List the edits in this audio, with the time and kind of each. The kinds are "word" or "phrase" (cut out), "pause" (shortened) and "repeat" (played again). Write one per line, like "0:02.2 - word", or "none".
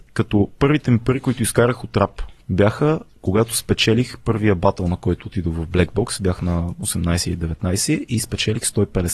0:02.4 - pause